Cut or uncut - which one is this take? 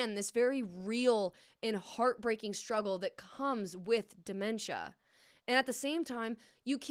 uncut